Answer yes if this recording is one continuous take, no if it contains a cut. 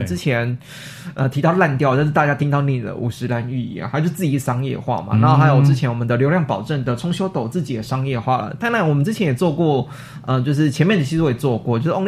yes